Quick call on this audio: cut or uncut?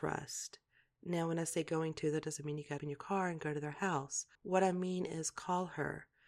cut